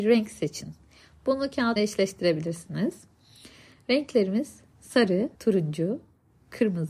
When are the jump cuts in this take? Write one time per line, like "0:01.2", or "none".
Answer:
0:01.8
0:05.3